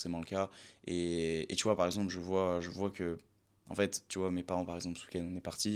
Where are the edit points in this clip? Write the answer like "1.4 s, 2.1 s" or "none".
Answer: none